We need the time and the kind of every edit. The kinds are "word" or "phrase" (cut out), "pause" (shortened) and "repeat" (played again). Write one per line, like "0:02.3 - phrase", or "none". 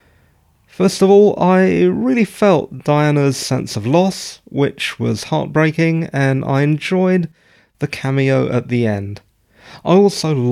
none

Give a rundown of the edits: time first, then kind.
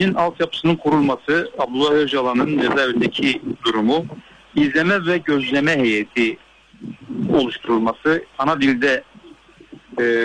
none

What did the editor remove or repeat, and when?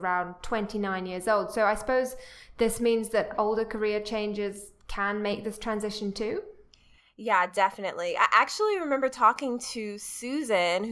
none

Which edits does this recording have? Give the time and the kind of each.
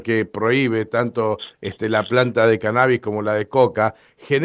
none

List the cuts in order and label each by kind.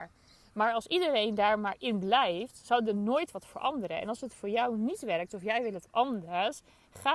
none

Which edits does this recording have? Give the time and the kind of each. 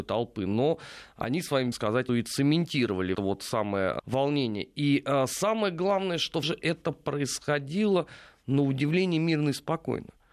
0:01.7 - phrase
0:02.1 - word
0:03.1 - phrase
0:04.0 - word
0:06.4 - word

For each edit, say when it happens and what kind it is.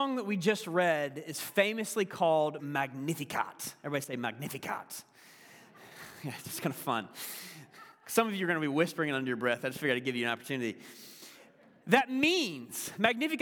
0:02.6 - word
0:09.6 - word

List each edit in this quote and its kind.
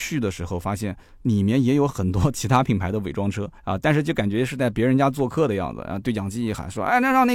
0:03.6 - pause

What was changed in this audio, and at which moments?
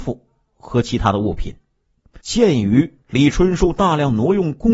0:02.2 - pause
0:03.0 - pause

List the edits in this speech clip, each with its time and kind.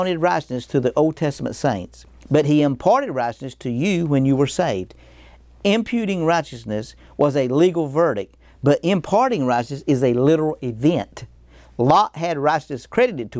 none

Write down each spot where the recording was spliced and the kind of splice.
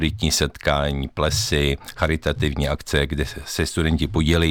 none

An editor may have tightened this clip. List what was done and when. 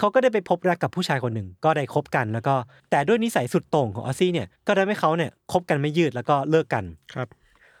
0:02.8 - pause
0:04.6 - pause

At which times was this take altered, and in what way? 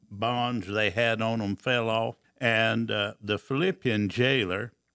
0:02.2 - pause

